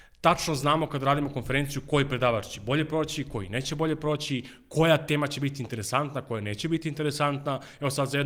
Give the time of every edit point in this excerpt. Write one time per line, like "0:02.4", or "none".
none